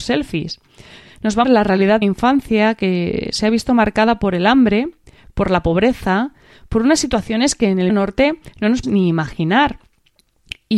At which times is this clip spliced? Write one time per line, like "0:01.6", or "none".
0:01.4
0:02.0
0:07.9
0:08.8